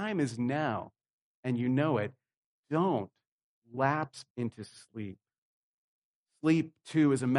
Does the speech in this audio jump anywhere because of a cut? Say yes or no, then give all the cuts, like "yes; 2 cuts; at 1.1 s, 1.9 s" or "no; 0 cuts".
yes; 1 cut; at 4.3 s